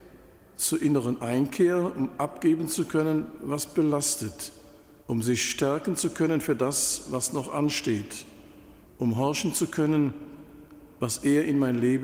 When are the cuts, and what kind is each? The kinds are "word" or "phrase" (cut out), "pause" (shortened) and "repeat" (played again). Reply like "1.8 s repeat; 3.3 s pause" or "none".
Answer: 5.0 s pause; 8.8 s pause